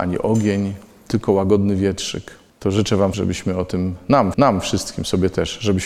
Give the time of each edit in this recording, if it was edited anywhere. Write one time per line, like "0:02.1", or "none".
0:02.5
0:03.1
0:04.3